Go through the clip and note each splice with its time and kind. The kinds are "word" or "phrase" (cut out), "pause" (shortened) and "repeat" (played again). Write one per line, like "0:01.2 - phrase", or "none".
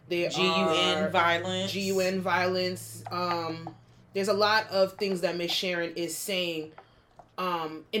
none